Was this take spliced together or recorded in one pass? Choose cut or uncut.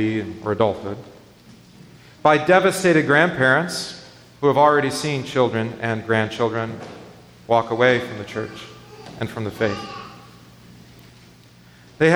uncut